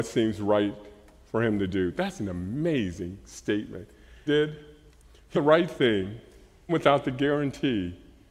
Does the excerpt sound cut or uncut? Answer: cut